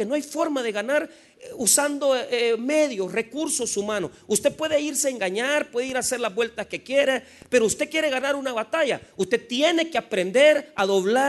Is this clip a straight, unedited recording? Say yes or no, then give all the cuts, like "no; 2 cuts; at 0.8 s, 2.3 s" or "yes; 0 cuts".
yes; 0 cuts